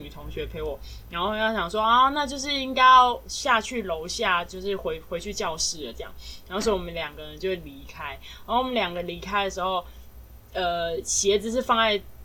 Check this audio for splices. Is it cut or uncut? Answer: uncut